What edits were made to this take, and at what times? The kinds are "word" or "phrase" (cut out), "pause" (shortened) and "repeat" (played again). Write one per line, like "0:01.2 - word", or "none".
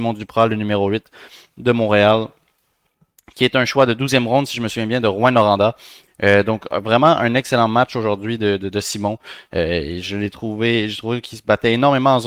none